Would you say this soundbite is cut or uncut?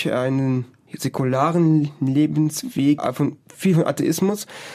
cut